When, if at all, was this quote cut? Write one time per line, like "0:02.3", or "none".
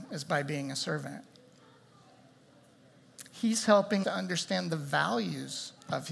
0:04.0